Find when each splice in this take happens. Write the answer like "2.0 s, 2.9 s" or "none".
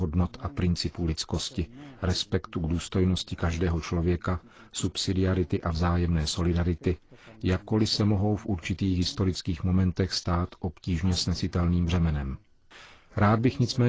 none